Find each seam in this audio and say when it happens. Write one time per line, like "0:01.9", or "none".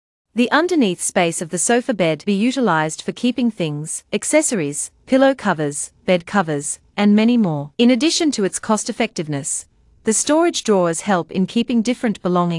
0:02.3
0:04.1
0:07.7